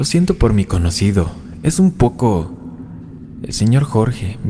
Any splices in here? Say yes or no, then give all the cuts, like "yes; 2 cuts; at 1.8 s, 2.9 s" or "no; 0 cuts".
no; 0 cuts